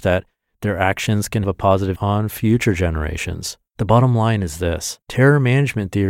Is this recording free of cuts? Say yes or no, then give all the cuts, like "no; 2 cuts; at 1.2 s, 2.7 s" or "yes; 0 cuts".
no; 4 cuts; at 1.4 s, 2.0 s, 3.7 s, 5.0 s